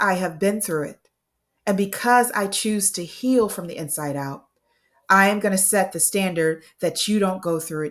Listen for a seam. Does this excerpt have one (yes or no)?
no